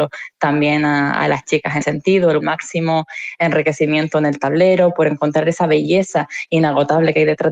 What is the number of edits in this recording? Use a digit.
2